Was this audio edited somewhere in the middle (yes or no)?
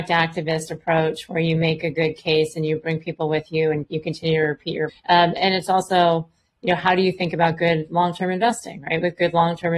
yes